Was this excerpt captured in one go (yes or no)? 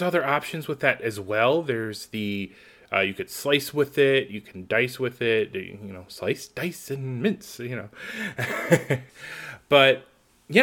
yes